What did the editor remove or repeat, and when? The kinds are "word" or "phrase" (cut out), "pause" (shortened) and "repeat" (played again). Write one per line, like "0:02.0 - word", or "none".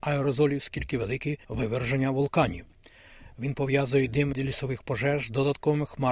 0:01.4 - pause
0:04.3 - word